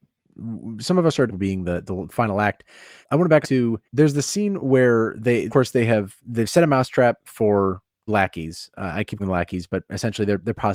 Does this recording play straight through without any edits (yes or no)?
no